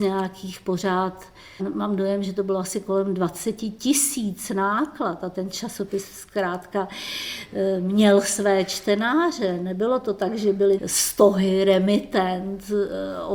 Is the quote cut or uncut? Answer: cut